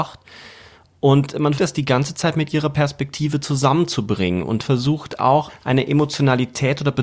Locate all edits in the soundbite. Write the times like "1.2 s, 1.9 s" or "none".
1.6 s, 5.5 s

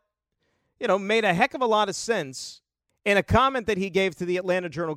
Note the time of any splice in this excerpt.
2.9 s

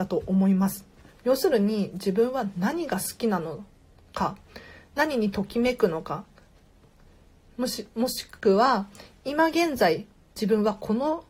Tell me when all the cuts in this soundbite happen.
none

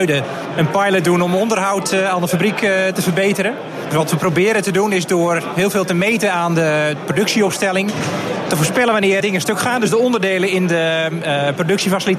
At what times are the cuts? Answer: 9.2 s

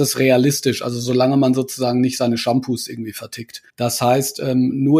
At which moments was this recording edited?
3.7 s

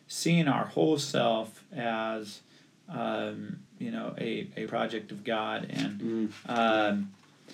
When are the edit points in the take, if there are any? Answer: 3.7 s, 4.7 s

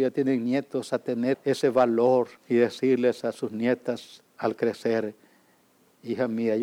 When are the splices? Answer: 1.3 s, 2.4 s, 4.3 s

